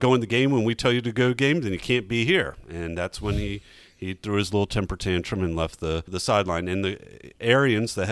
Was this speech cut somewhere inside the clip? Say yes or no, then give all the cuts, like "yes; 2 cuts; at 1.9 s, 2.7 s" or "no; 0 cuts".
no; 0 cuts